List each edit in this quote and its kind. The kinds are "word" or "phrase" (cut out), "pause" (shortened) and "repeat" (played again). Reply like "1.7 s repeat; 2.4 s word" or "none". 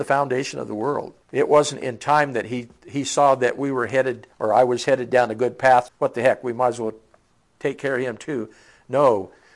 1.2 s pause; 4.3 s pause; 5.9 s word